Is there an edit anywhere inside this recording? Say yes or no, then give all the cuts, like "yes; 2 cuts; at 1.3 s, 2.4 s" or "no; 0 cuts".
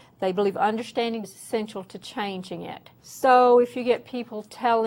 yes; 2 cuts; at 1.2 s, 3.0 s